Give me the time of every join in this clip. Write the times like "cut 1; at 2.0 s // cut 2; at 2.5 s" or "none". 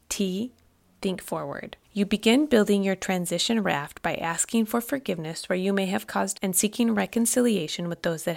cut 1; at 1.8 s // cut 2; at 6.3 s